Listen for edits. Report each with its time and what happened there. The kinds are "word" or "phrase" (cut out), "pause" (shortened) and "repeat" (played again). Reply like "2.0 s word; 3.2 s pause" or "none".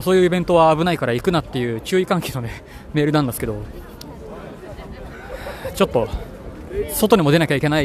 none